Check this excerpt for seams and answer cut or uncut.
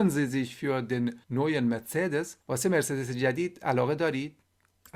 cut